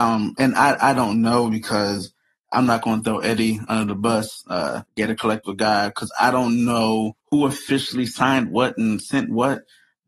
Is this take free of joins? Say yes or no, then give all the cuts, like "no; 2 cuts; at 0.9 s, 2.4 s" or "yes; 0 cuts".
no; 2 cuts; at 4.9 s, 7.2 s